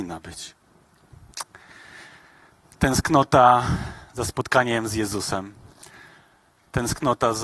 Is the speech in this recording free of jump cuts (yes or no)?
yes